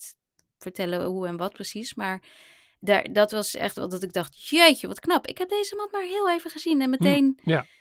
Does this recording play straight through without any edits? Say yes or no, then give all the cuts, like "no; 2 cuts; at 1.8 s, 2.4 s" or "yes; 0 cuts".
yes; 0 cuts